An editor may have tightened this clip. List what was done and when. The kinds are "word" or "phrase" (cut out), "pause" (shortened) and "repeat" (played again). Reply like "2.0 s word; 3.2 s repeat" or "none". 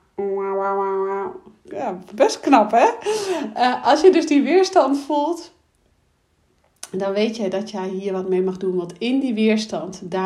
none